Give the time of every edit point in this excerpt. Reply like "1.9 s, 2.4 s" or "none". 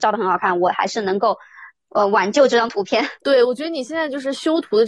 3.2 s